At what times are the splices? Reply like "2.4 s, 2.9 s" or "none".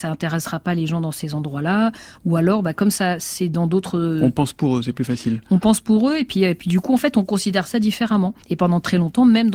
8.4 s